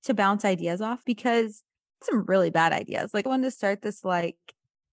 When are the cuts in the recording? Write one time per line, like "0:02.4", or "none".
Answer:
0:01.0
0:02.0
0:03.3